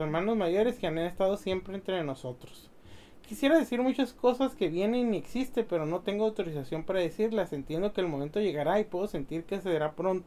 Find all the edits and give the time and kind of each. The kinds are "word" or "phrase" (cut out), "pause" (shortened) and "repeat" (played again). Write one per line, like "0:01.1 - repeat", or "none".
none